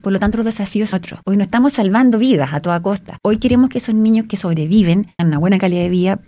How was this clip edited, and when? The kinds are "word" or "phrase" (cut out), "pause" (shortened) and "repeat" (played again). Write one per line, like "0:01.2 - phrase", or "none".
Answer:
0:00.9 - word
0:05.2 - word